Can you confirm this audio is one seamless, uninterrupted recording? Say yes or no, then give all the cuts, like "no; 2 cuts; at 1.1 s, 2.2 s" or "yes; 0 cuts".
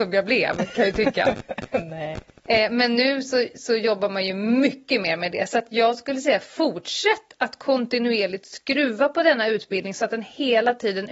yes; 0 cuts